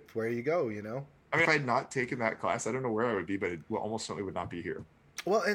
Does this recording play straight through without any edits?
no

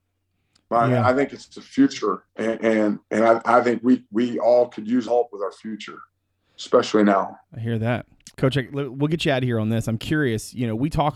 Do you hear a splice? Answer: yes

